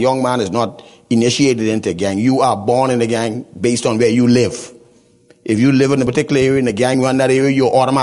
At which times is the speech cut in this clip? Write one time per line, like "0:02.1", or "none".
none